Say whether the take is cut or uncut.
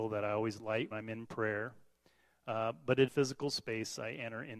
cut